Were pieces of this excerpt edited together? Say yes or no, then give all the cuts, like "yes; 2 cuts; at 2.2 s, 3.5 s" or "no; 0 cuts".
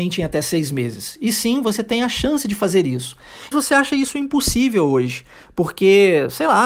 yes; 1 cut; at 3.5 s